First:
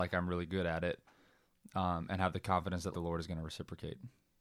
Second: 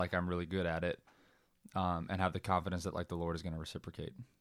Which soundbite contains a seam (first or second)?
first